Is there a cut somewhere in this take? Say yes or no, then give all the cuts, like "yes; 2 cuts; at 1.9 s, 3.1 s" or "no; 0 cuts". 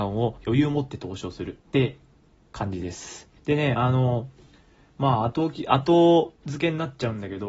yes; 2 cuts; at 1.6 s, 3.4 s